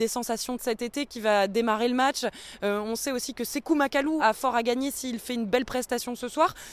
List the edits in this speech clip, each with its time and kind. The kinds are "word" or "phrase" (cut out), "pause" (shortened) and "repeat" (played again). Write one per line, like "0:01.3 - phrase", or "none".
0:04.2 - word